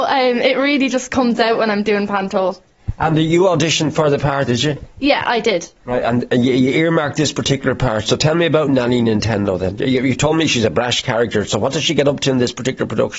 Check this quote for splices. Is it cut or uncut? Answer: cut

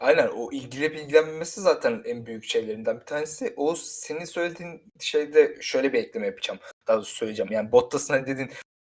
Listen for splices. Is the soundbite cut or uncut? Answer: uncut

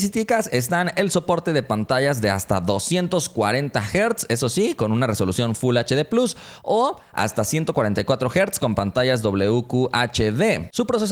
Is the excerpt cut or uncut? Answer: uncut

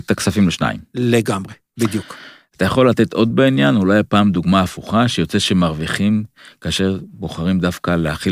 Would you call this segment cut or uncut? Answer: cut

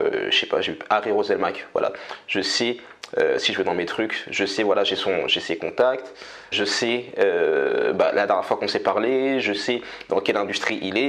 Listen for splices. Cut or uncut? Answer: cut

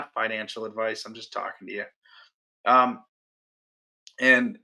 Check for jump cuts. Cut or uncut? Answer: uncut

